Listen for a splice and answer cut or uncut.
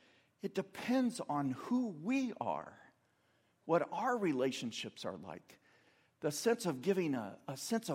uncut